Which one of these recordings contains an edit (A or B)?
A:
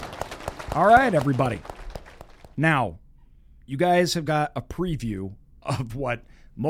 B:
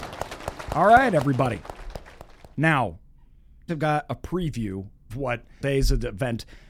B